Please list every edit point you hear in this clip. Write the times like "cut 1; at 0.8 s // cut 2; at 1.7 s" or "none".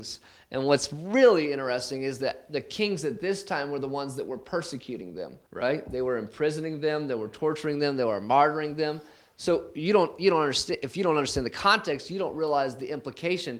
cut 1; at 5.5 s